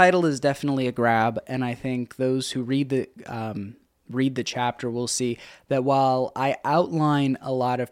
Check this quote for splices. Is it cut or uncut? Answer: uncut